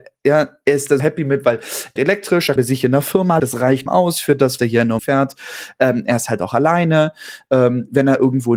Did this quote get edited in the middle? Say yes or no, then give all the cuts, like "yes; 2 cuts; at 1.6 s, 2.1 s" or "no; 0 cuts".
yes; 7 cuts; at 1.0 s, 2.0 s, 2.6 s, 3.4 s, 3.9 s, 4.6 s, 5.0 s